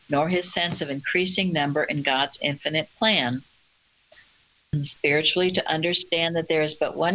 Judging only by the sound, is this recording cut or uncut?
uncut